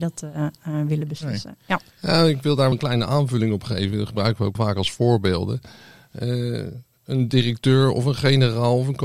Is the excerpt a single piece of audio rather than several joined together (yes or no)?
no